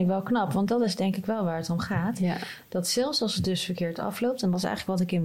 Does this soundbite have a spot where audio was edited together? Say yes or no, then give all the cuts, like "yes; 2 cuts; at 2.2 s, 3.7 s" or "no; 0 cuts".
no; 0 cuts